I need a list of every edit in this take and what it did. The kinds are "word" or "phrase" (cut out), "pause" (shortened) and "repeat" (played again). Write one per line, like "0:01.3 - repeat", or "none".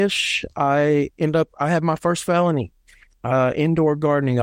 none